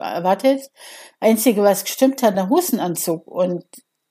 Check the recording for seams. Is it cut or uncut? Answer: cut